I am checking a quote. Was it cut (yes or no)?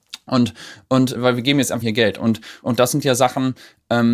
yes